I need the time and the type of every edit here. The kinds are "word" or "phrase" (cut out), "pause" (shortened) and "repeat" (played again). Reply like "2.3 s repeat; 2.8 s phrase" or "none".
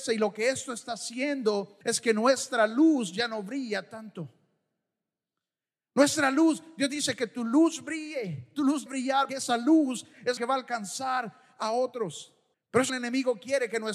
1.8 s pause; 8.9 s word; 9.3 s word; 10.4 s word; 12.5 s pause; 12.9 s phrase

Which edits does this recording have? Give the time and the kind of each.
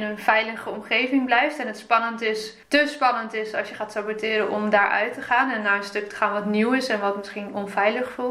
2.6 s pause

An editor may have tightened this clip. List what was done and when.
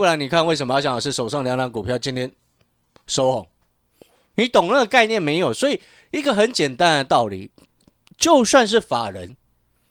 none

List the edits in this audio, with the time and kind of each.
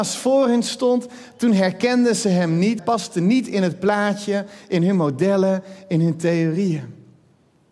2.8 s phrase

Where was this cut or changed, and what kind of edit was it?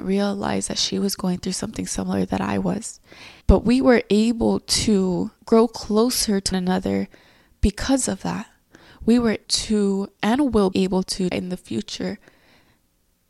3.4 s pause; 5.4 s pause; 6.5 s word; 9.4 s word; 10.7 s word; 11.3 s word

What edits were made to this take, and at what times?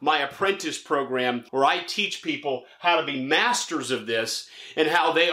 1.5 s pause

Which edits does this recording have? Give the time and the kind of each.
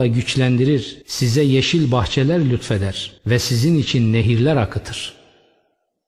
1.0 s pause; 3.2 s pause

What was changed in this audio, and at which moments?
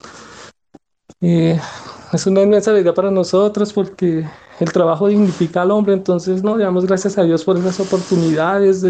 none

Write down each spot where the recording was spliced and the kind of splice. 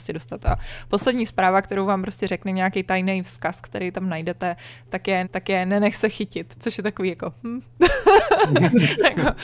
5.2 s repeat

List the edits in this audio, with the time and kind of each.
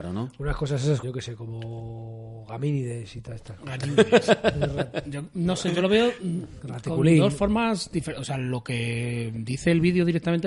1.0 s word

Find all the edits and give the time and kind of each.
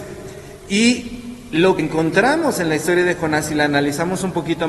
1.8 s word

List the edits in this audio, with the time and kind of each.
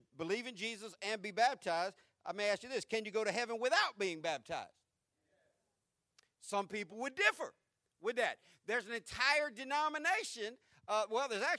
none

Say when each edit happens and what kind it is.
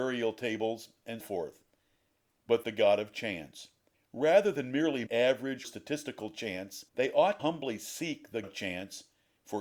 1.2 s word; 2.6 s phrase; 3.9 s pause; 5.1 s word; 5.6 s word; 6.9 s pause; 7.4 s word; 8.4 s word

